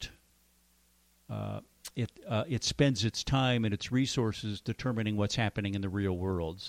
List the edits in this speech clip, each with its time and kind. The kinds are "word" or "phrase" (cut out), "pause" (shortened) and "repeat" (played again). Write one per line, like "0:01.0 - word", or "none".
none